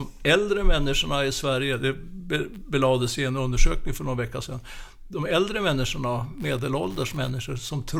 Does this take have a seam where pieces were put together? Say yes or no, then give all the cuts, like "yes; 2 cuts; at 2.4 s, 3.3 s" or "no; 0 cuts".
no; 0 cuts